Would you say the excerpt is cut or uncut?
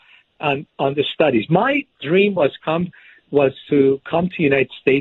uncut